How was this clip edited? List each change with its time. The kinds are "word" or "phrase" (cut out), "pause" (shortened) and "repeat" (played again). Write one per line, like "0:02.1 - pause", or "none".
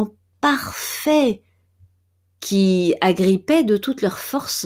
none